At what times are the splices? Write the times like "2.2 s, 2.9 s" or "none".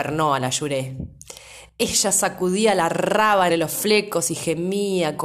3.5 s